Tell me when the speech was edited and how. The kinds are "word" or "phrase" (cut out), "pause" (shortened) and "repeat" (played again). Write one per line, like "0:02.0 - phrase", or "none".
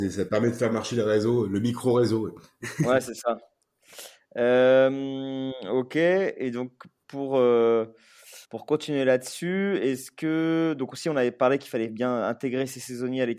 0:08.4 - pause